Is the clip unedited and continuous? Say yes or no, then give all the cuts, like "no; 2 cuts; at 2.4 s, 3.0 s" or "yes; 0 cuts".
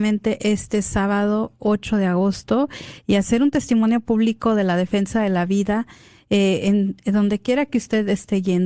yes; 0 cuts